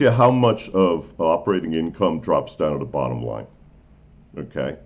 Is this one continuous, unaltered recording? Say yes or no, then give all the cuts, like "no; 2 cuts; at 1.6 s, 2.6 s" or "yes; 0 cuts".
yes; 0 cuts